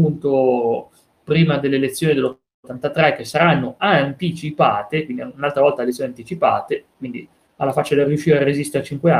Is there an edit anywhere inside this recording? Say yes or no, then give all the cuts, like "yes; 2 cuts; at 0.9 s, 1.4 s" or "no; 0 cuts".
no; 0 cuts